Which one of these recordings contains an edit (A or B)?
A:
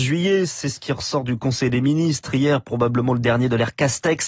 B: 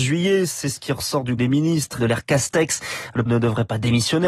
B